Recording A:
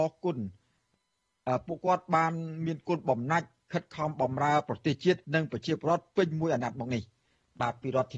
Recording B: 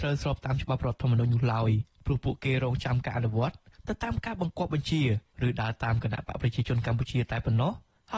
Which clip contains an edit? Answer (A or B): A